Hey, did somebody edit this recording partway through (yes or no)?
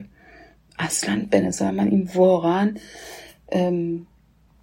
no